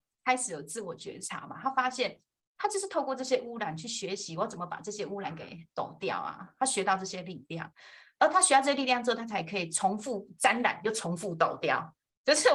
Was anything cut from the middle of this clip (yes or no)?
no